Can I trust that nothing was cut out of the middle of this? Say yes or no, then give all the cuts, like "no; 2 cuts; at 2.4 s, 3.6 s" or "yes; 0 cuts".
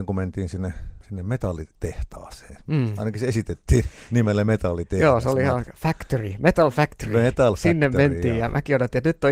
yes; 0 cuts